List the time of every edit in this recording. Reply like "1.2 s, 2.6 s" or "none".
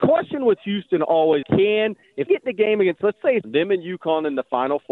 1.4 s, 2.3 s, 3.4 s